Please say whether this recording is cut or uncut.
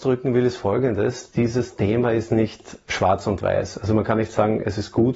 uncut